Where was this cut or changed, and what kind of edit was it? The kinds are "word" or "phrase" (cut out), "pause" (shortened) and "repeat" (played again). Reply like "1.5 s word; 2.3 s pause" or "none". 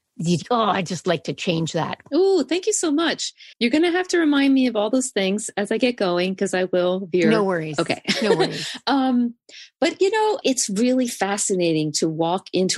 3.5 s pause; 10.4 s word